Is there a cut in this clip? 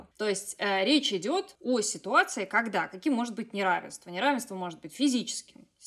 no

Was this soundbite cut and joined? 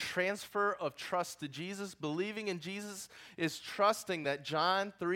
no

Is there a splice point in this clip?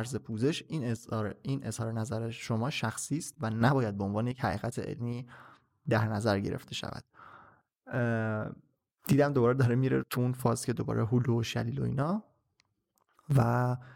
no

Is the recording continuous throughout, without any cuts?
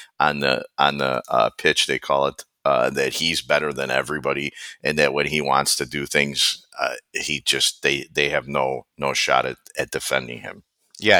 no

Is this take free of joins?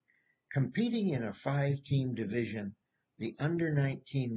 yes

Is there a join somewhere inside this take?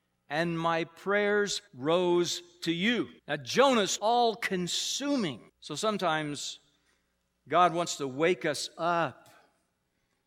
yes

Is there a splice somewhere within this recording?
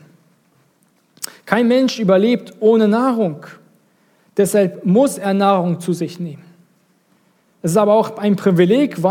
no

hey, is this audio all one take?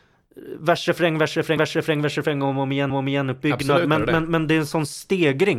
no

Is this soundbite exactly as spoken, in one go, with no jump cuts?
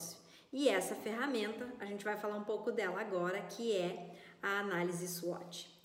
yes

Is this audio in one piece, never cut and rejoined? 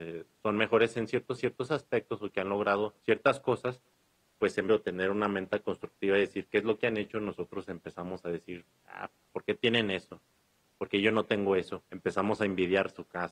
no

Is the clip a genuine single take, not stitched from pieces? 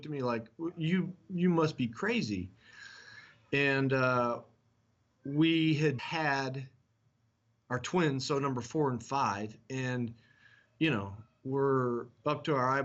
no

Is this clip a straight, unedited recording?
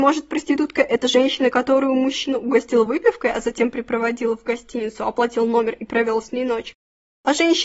yes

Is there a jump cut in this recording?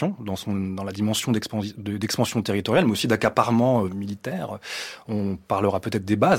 yes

